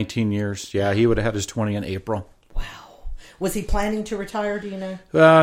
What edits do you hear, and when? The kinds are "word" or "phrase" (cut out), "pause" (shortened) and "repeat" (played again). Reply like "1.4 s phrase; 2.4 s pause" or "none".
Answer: none